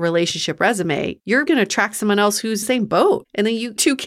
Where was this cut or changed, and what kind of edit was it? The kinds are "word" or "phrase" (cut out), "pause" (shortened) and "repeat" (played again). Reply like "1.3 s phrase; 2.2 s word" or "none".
1.5 s word; 2.6 s phrase